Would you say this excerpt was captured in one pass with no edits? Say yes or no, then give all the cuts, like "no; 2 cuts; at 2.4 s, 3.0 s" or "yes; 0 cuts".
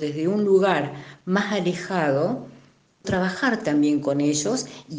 no; 1 cut; at 3.0 s